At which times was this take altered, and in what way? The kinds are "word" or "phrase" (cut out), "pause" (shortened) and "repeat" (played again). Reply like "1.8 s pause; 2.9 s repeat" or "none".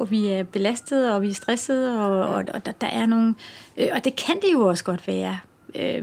none